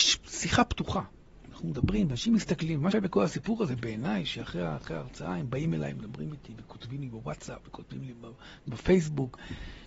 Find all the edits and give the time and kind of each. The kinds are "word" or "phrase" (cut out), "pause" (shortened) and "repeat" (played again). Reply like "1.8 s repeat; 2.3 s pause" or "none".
2.9 s word